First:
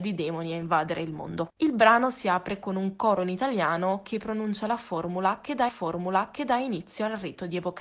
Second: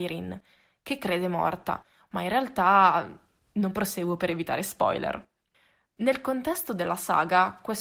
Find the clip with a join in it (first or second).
first